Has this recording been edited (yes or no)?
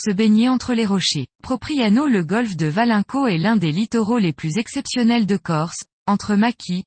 yes